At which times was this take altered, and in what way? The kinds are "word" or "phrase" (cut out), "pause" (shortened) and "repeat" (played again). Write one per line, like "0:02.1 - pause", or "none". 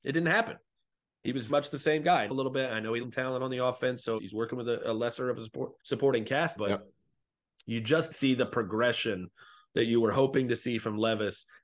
0:01.5 - word
0:02.3 - phrase
0:03.0 - word
0:04.2 - word
0:05.8 - pause
0:06.6 - word
0:08.1 - word